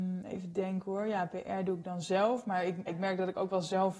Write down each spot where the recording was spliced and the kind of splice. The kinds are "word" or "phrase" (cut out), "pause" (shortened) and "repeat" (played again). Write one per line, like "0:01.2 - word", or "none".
0:02.9 - word